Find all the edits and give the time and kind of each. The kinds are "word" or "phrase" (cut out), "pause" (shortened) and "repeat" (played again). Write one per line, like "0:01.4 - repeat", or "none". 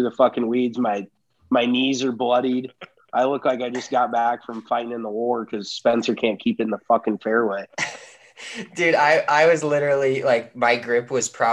none